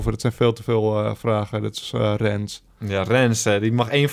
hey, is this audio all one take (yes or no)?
yes